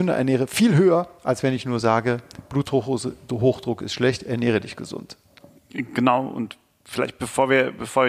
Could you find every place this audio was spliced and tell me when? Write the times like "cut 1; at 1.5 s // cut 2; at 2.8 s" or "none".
none